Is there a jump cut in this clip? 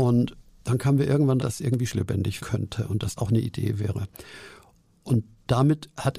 yes; 4 cuts; at 1.4 s, 1.9 s, 2.4 s, 3.2 s

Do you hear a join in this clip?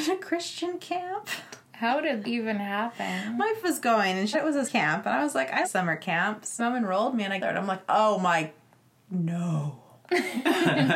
yes; 7 cuts; at 2.2 s, 3.6 s, 4.3 s, 4.6 s, 5.6 s, 6.6 s, 7.4 s

